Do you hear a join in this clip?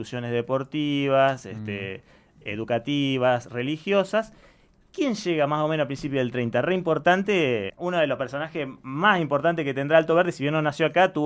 yes; 1 cut; at 7.7 s

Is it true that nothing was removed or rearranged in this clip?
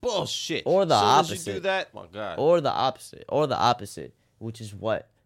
no; 1 cut; at 1.9 s

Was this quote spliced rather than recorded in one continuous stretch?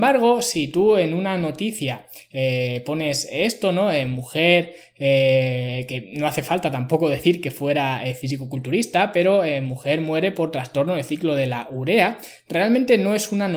no; 0 cuts

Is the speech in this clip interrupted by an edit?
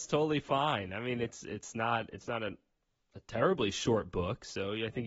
no; 0 cuts

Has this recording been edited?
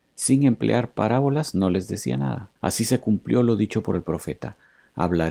yes; 1 cut; at 2.6 s

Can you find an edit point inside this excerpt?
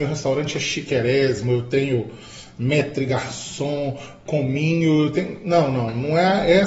no; 0 cuts

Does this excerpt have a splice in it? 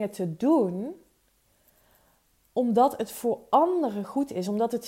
no; 0 cuts

